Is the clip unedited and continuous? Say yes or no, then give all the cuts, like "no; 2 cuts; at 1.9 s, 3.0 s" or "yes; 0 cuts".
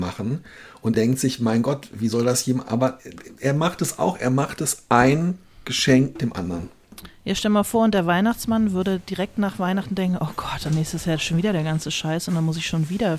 no; 2 cuts; at 0.9 s, 6.2 s